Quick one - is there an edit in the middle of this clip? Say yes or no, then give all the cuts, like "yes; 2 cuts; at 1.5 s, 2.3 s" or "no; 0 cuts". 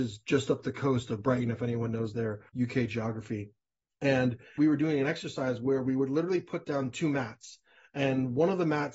no; 0 cuts